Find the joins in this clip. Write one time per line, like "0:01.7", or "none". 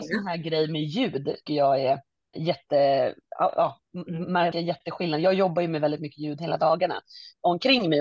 0:01.5
0:02.3
0:04.5

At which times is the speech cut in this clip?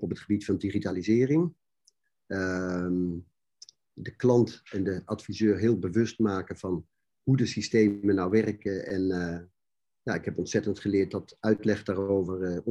none

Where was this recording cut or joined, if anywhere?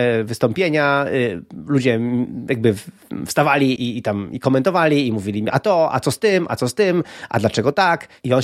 0:03.8

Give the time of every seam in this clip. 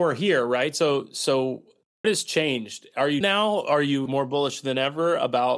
0:02.0
0:03.2
0:04.1

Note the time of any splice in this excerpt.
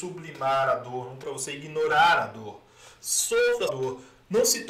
0:01.2
0:03.7

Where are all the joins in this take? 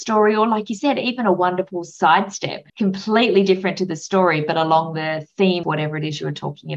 0:02.7
0:05.6

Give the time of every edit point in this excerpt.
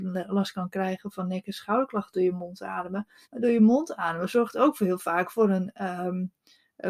0:03.2

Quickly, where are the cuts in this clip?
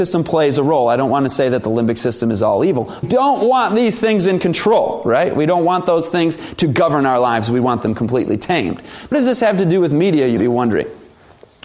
0:03.0
0:09.1
0:10.4

